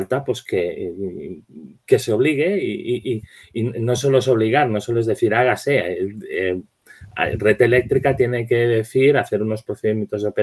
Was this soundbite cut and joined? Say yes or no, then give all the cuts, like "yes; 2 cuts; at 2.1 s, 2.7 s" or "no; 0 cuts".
no; 0 cuts